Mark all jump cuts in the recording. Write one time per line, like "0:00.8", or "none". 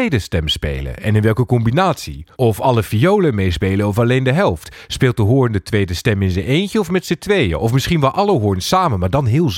0:02.3

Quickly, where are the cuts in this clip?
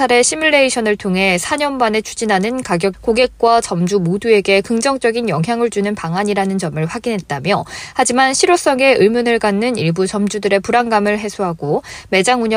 0:02.9

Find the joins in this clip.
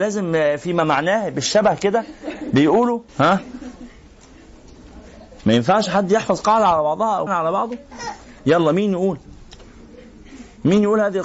0:03.1
0:07.3

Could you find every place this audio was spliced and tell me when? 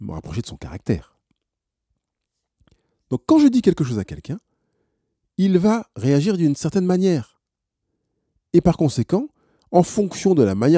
none

